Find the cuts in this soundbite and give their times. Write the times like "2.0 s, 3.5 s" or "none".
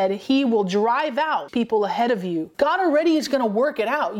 1.5 s, 2.5 s

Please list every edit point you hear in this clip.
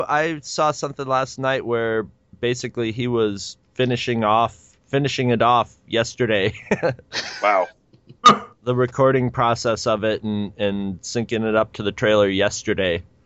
3.6 s, 4.8 s

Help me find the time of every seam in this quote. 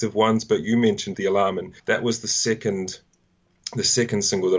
1.1 s, 1.8 s

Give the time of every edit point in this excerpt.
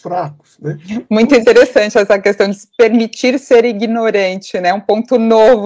none

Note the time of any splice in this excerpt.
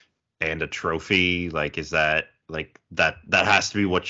2.4 s

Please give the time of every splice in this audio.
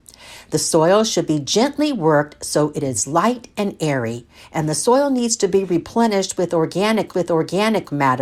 7.1 s

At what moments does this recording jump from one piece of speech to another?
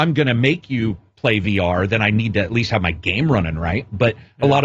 none

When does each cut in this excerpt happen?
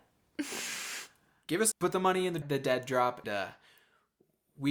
1.7 s, 2.4 s, 3.2 s

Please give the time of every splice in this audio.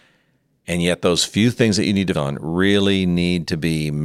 2.1 s

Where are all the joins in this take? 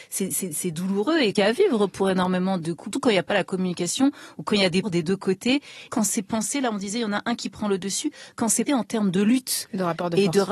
1.4 s, 2.6 s, 2.9 s, 4.8 s, 5.9 s, 8.7 s

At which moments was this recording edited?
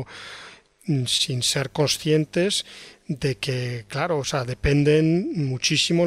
1.1 s

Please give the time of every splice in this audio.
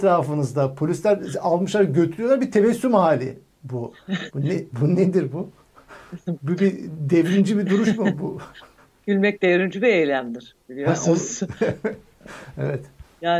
8.8 s

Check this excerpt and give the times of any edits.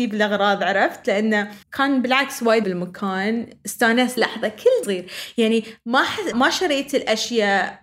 1.6 s, 2.6 s, 4.2 s, 4.8 s, 6.3 s

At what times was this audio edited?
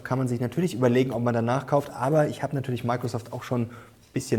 none

